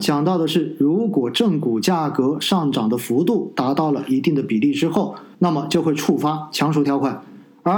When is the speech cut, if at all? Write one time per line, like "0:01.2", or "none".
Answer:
0:05.3